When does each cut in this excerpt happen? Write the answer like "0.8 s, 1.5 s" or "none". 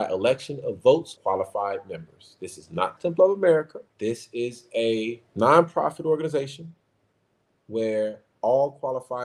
1.2 s, 3.0 s, 3.9 s, 5.3 s